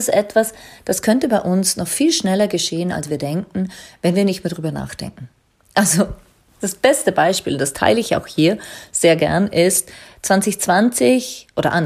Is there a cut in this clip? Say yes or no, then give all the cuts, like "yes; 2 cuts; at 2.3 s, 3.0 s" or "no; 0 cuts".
no; 0 cuts